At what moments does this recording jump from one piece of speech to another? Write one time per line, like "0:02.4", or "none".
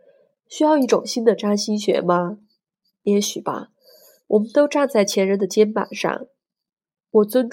none